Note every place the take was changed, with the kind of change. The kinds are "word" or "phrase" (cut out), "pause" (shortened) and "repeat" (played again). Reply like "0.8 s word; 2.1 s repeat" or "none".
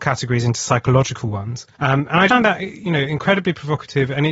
1.7 s pause; 2.3 s word